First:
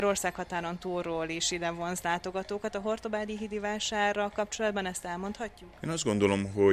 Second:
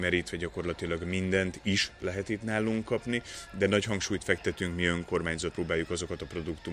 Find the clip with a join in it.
second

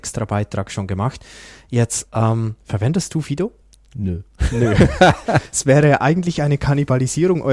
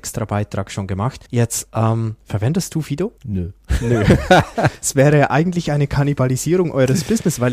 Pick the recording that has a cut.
second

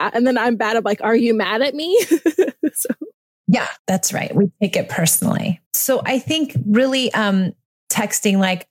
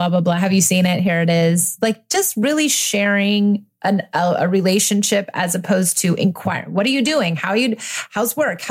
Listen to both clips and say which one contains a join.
first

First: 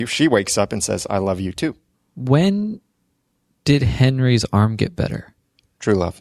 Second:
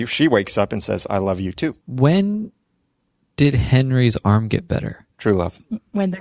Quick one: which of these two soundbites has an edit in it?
second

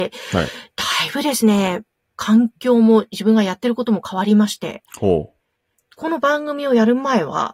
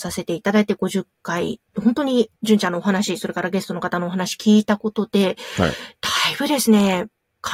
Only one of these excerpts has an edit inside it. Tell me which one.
second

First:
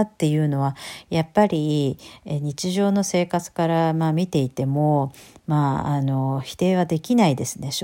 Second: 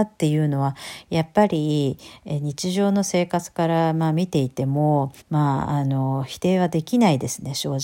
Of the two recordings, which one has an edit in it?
second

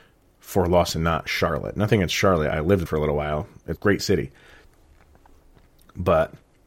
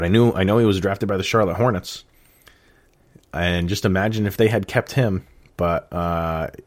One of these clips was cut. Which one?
first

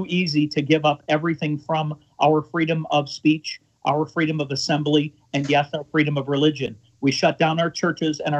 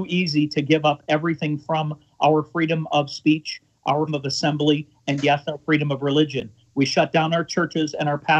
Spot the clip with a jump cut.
second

